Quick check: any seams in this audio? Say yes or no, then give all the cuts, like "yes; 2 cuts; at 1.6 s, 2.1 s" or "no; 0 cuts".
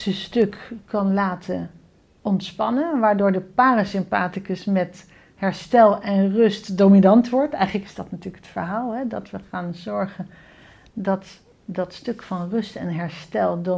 no; 0 cuts